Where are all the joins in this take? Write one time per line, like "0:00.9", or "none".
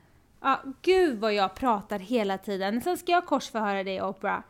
none

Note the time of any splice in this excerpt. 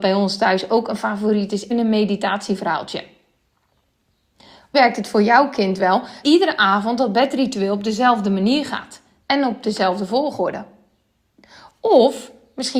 0:01.7
0:04.7
0:06.2

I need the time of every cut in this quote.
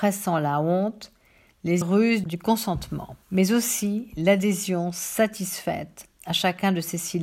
0:01.8
0:03.2

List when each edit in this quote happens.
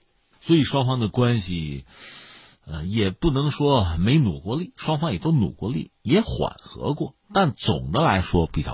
none

